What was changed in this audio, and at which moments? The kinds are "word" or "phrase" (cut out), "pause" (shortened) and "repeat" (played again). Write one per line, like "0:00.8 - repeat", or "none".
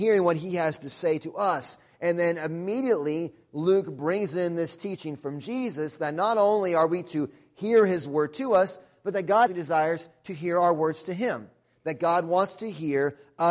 0:09.5 - word